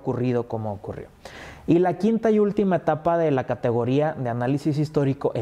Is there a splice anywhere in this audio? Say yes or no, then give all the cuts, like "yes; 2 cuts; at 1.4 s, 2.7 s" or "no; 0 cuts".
no; 0 cuts